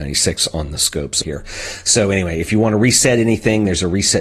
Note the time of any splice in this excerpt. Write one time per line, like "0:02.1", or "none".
0:01.2